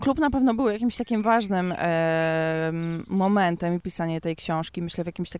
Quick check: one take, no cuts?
no; 1 cut; at 3.8 s

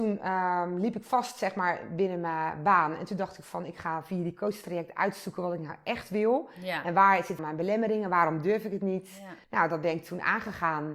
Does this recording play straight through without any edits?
no; 2 cuts; at 7.4 s, 9.4 s

